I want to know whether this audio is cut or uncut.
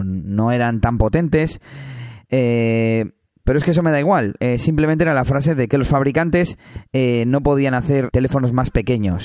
uncut